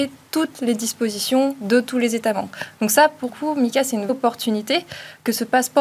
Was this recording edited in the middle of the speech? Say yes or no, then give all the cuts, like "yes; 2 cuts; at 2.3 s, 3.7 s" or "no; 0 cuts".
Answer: yes; 2 cuts; at 3.3 s, 4.1 s